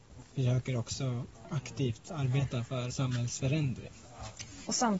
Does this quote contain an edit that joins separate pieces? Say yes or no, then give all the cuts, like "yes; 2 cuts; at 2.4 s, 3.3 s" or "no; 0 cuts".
yes; 1 cut; at 2.9 s